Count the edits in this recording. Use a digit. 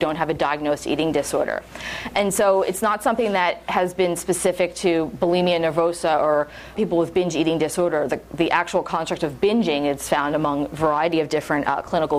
1